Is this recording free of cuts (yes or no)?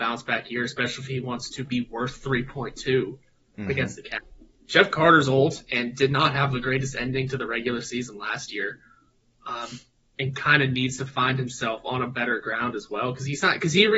yes